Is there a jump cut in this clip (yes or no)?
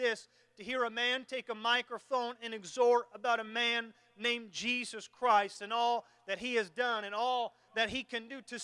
no